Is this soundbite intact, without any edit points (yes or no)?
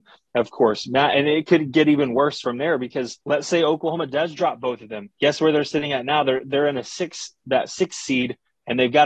no